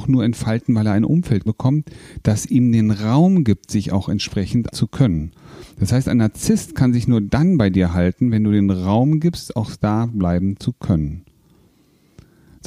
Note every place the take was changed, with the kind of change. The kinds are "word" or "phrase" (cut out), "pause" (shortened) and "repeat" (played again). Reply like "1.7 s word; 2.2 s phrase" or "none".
1.5 s word; 4.7 s word

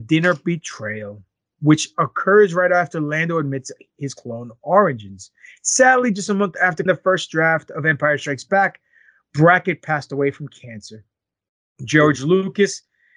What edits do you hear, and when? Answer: 6.9 s word

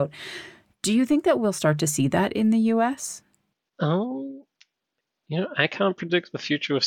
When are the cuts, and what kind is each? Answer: none

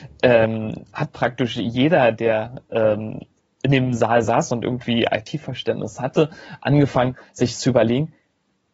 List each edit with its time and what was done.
none

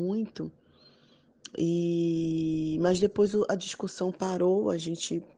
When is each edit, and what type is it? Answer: none

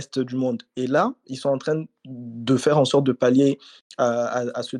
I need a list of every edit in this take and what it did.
none

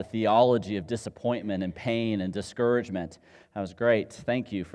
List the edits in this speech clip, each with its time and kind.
none

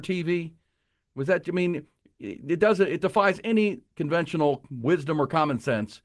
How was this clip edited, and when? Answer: none

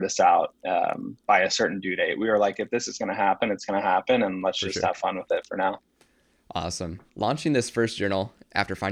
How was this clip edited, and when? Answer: 7.1 s pause

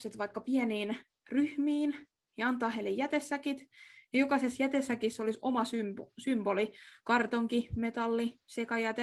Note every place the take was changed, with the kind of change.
none

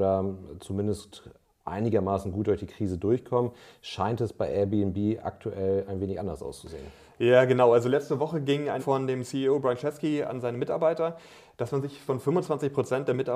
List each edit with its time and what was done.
8.8 s word; 12.1 s word

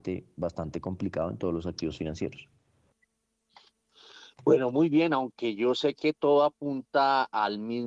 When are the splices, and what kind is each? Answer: none

